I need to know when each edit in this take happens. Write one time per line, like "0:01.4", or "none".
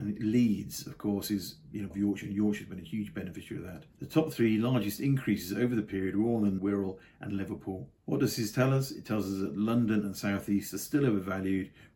0:01.9
0:03.9
0:06.6
0:08.0